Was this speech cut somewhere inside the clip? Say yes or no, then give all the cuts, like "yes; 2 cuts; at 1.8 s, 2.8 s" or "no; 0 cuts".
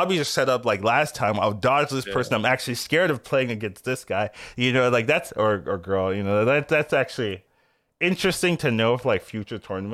no; 0 cuts